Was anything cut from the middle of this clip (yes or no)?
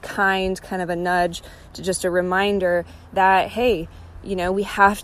no